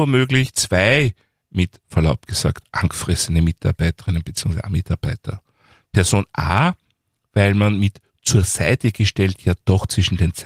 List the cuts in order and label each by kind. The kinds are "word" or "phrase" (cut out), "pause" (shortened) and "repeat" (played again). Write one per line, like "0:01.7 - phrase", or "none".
none

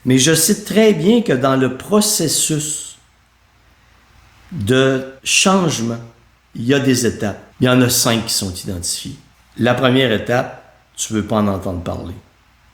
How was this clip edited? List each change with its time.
0:05.2 - pause
0:07.5 - pause
0:09.3 - pause

